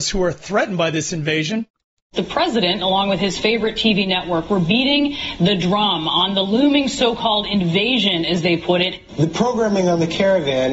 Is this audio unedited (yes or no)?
yes